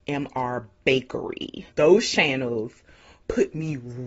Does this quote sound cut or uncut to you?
cut